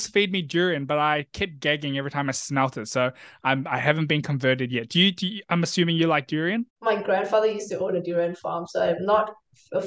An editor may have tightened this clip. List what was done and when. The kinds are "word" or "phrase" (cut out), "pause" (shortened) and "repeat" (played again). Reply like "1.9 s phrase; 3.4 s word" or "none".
none